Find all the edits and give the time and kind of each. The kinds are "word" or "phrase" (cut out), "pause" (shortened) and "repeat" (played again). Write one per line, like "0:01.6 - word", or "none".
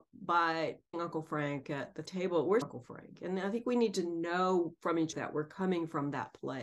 0:00.9 - word
0:02.1 - word
0:02.6 - word
0:05.1 - word